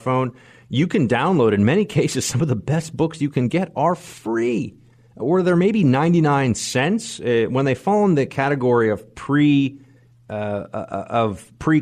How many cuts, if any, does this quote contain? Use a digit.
0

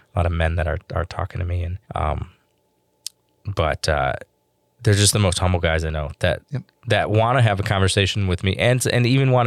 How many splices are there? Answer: 1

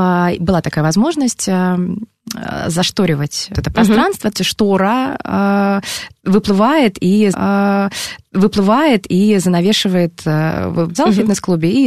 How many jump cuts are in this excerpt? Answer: 4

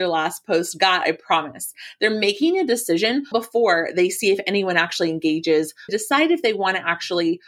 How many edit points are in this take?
2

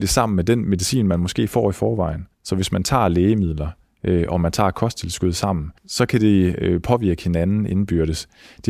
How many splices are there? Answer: 2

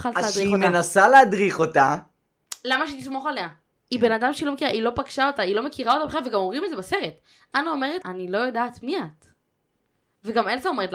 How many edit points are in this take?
1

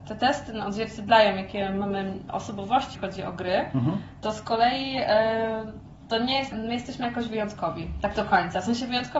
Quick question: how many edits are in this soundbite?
2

